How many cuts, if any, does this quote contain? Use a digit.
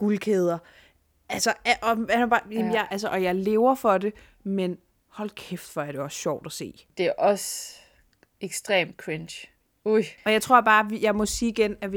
0